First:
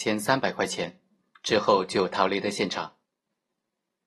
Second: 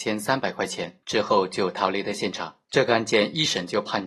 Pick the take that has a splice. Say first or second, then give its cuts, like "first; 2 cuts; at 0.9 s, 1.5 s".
second; 2 cuts; at 1.0 s, 2.6 s